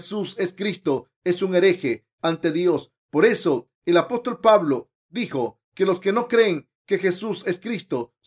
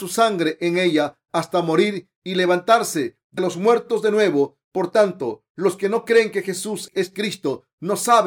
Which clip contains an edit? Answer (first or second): second